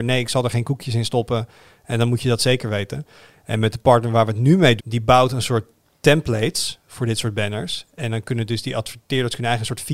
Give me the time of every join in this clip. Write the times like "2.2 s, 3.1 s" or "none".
4.8 s